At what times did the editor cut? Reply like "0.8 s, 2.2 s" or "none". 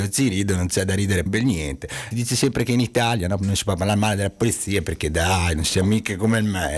1.3 s, 2.1 s